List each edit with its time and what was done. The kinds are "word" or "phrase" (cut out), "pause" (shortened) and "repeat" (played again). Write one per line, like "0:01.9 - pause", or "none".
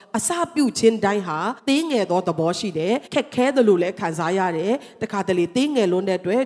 0:01.6 - pause
0:03.1 - pause